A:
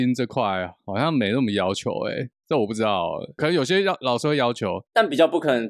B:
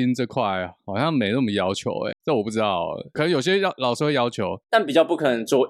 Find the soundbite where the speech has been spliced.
B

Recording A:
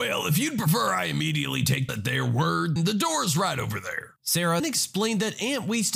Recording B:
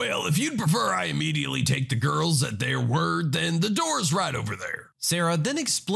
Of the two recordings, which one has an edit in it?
A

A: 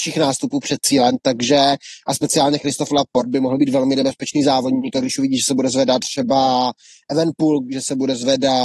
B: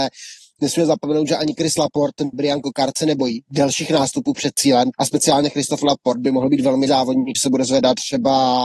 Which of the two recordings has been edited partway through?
B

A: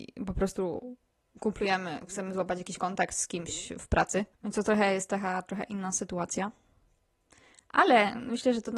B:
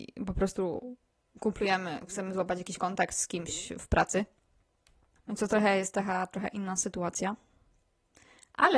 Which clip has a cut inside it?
A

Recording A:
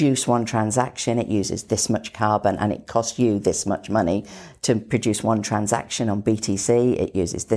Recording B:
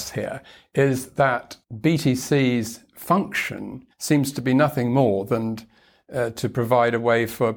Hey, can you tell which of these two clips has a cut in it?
B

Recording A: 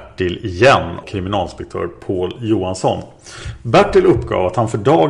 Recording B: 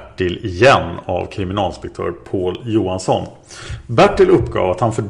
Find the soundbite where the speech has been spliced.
A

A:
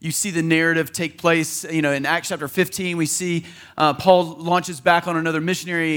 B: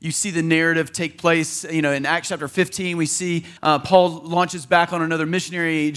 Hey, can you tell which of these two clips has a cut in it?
B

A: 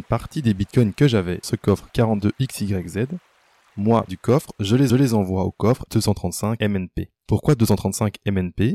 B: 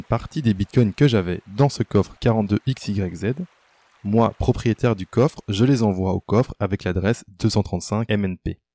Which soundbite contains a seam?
A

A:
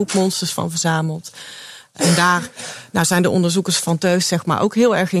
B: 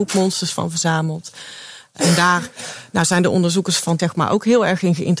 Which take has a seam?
B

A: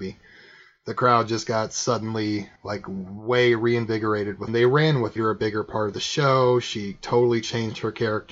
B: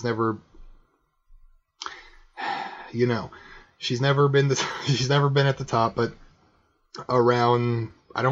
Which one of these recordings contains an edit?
A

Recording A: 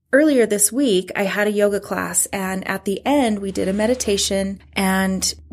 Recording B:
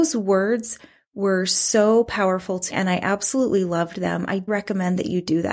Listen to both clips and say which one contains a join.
B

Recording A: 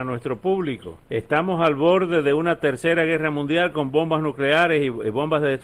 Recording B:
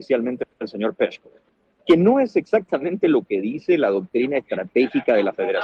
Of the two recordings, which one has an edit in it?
A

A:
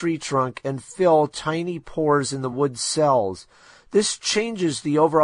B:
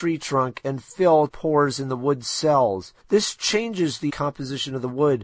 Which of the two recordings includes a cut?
B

